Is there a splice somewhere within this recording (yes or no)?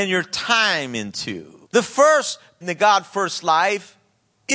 yes